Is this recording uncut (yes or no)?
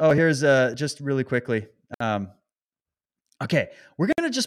yes